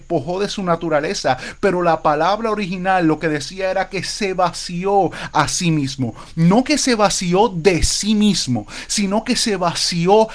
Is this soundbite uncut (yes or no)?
yes